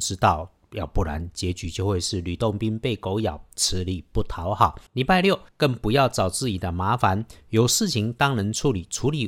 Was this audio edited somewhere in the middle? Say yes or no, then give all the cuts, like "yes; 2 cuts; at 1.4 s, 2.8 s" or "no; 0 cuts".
yes; 2 cuts; at 4.9 s, 5.5 s